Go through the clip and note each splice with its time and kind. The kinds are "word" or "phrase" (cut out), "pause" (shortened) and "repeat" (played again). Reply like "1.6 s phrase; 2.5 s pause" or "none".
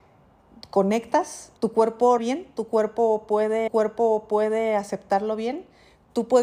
1.6 s pause; 2.2 s word; 3.7 s repeat